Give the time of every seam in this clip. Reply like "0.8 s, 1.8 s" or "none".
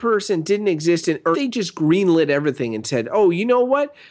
1.3 s